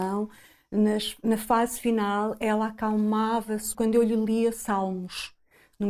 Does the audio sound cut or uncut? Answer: cut